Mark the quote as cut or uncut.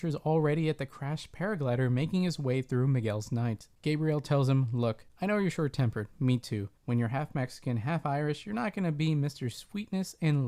cut